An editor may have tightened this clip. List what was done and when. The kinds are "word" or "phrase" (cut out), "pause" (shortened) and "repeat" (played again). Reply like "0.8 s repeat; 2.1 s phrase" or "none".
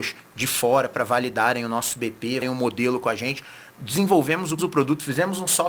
2.4 s word; 3.7 s pause; 4.6 s phrase